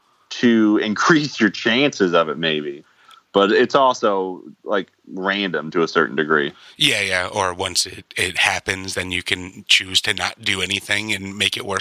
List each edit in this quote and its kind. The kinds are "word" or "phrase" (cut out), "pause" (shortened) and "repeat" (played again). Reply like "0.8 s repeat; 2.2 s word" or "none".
none